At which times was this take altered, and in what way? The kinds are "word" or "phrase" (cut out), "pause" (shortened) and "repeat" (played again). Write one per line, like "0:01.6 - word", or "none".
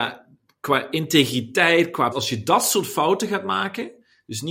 0:02.1 - word

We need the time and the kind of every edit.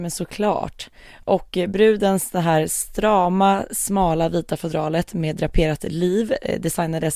none

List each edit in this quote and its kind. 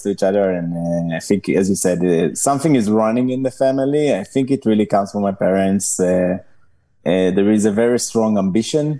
none

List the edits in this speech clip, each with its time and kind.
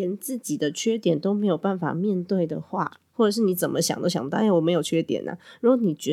0:03.1 - pause

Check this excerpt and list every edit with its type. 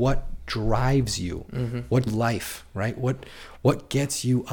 0:02.1 - phrase

